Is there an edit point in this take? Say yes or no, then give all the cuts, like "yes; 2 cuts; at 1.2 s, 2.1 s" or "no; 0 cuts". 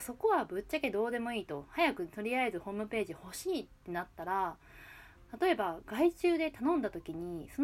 no; 0 cuts